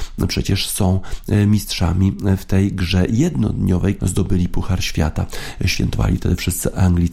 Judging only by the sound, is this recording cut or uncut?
cut